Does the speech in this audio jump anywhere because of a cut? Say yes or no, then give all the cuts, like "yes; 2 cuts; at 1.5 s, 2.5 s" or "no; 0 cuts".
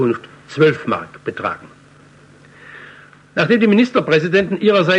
no; 0 cuts